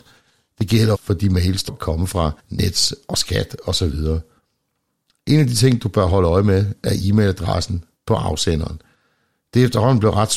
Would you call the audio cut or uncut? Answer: cut